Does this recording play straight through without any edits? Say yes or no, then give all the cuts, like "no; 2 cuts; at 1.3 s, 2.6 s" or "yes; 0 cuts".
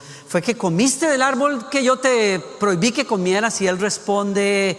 yes; 0 cuts